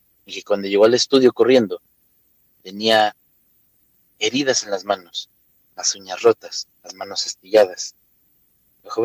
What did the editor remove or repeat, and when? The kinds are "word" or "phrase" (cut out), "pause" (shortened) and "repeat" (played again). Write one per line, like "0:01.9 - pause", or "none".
none